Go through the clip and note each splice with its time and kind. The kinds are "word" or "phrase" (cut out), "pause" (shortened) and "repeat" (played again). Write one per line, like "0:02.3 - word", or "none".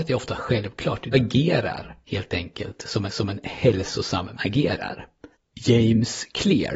0:01.1 - word
0:02.0 - pause
0:03.1 - repeat
0:04.3 - word
0:05.3 - pause